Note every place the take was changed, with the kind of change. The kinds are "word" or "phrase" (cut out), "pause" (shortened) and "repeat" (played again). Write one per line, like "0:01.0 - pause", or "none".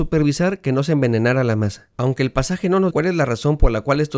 0:01.9 - pause
0:02.9 - word